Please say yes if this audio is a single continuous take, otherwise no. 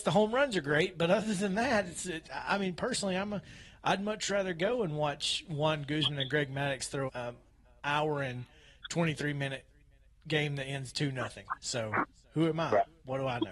no